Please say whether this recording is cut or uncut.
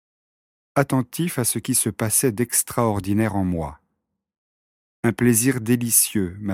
uncut